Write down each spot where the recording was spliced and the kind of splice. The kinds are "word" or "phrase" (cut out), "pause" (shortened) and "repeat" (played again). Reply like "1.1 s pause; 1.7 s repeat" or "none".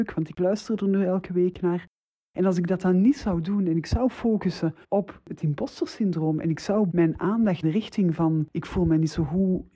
4.8 s pause; 6.9 s word; 7.6 s word